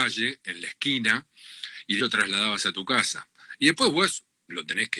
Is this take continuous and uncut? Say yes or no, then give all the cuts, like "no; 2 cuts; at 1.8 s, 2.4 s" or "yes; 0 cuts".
no; 1 cut; at 2.0 s